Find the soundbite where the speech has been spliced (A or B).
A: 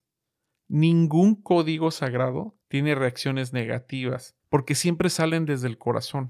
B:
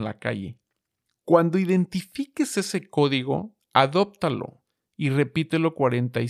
A